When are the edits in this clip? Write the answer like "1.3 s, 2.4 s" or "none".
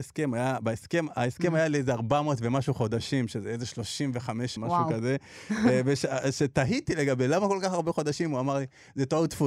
4.6 s